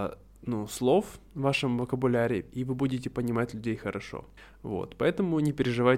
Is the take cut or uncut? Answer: cut